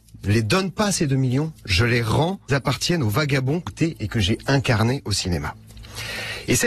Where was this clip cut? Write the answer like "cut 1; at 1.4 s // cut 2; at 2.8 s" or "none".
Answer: cut 1; at 2.5 s // cut 2; at 3.7 s